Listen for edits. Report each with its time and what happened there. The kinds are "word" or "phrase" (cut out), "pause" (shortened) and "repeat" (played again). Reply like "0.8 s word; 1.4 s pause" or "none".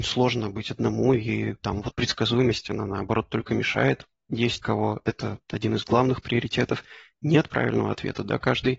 1.9 s word; 4.6 s phrase; 5.4 s pause